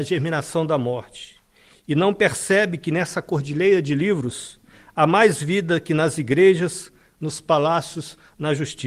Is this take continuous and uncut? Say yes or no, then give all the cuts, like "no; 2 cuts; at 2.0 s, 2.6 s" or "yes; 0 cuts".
yes; 0 cuts